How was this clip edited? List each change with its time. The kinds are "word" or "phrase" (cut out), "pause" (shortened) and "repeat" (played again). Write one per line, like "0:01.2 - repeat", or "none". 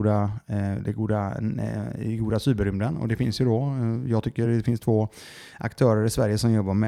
none